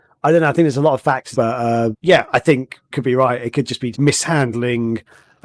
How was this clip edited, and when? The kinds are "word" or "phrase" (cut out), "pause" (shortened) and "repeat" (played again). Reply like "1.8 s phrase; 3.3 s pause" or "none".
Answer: 1.3 s word; 1.9 s word; 2.9 s word; 3.9 s word